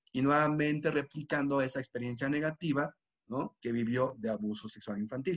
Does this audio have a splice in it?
no; 0 cuts

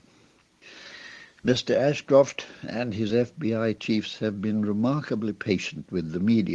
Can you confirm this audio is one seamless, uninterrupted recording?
yes; 0 cuts

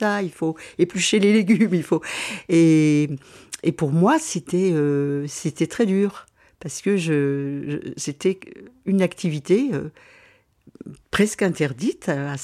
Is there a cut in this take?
no; 0 cuts

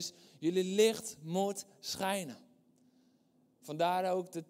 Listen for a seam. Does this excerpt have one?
no; 0 cuts

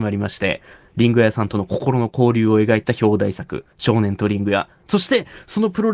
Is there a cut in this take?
yes; 1 cut; at 3.7 s

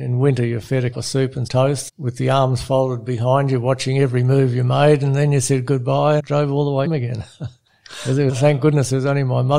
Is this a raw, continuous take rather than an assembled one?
no; 6 cuts; at 0.9 s, 1.5 s, 1.9 s, 6.2 s, 6.8 s, 8.3 s

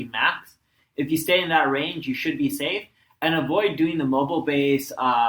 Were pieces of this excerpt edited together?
no; 0 cuts

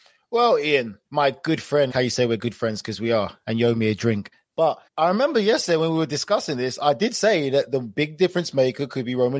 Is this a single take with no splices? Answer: no; 3 cuts; at 1.0 s, 1.9 s, 4.9 s

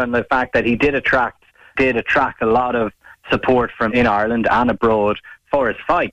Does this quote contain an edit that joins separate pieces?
yes; 2 cuts; at 1.8 s, 3.9 s

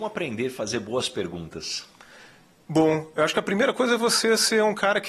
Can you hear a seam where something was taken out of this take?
no; 0 cuts

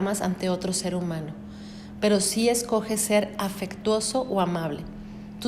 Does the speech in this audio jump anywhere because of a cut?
no; 0 cuts

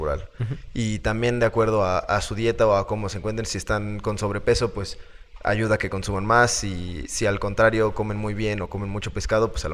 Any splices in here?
no; 0 cuts

